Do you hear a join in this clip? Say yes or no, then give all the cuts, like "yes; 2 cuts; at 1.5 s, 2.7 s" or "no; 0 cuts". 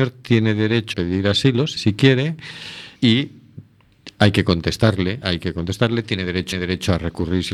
yes; 5 cuts; at 0.9 s, 1.8 s, 3.0 s, 5.2 s, 6.5 s